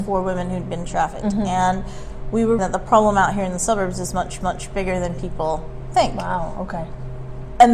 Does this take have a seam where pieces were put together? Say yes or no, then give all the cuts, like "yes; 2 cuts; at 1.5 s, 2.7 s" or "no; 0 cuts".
yes; 2 cuts; at 2.6 s, 4.4 s